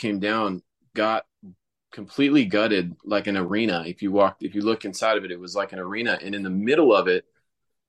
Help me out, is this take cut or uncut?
uncut